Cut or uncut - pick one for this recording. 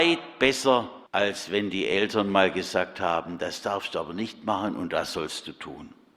cut